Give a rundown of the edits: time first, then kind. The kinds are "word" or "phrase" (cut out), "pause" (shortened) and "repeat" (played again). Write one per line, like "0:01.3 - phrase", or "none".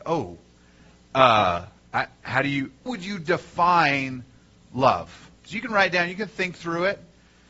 0:02.9 - word
0:05.4 - pause